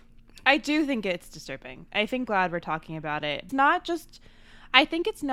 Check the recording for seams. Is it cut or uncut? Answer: cut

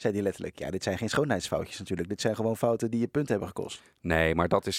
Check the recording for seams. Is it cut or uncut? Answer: uncut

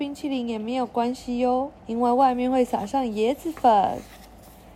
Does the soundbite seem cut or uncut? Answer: cut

